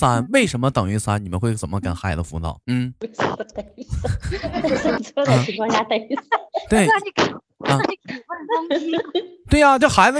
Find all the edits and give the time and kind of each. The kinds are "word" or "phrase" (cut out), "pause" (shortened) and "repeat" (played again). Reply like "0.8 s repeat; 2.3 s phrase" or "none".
2.6 s pause